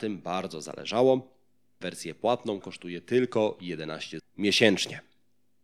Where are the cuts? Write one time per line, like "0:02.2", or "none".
0:01.8
0:02.6
0:04.2